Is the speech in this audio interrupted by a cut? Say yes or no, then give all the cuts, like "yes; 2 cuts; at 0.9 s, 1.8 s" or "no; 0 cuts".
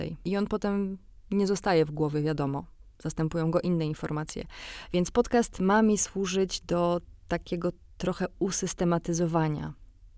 no; 0 cuts